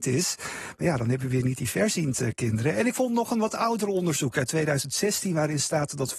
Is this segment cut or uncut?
uncut